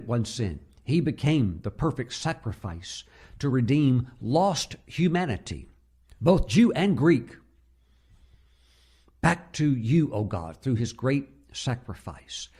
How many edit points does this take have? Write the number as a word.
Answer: zero